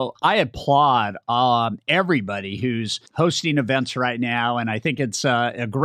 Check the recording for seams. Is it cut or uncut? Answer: cut